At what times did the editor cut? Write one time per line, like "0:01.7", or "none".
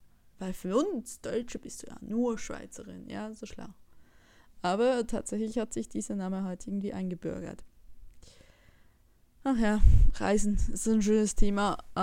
0:03.5

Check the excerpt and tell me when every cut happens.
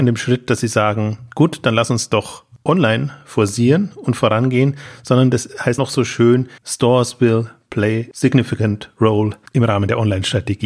0:05.8
0:06.6
0:09.5

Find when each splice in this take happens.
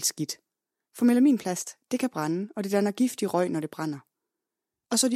none

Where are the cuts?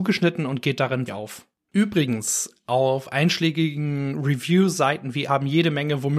0:01.1
0:05.3

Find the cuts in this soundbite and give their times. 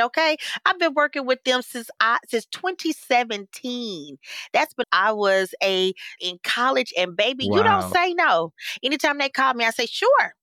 0:04.8
0:06.2

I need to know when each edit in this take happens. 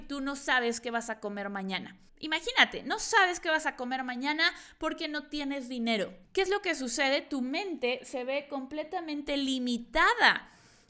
0:02.1
0:06.2

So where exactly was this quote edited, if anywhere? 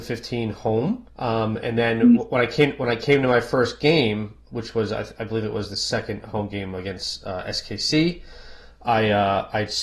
0:01.1

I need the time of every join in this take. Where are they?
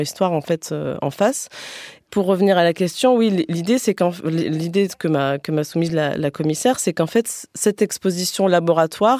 none

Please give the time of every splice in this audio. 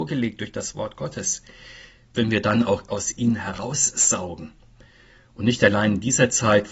0:02.1
0:02.9

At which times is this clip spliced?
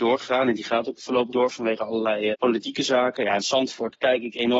0:01.3
0:02.3
0:03.4

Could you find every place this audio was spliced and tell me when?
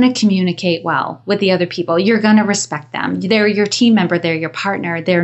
none

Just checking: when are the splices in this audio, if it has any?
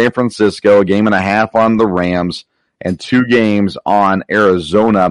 none

